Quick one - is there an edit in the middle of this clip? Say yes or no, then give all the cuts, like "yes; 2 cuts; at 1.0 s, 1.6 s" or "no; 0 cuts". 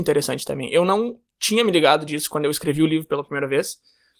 no; 0 cuts